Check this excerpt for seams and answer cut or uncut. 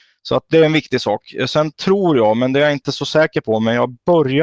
uncut